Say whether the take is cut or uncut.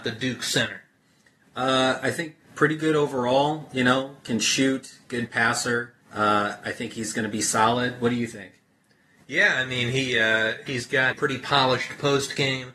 cut